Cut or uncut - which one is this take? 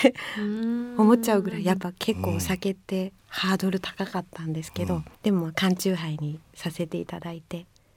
cut